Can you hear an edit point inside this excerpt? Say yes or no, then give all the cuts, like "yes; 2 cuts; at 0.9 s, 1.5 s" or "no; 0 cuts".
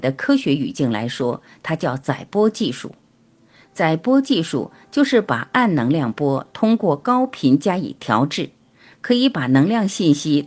no; 0 cuts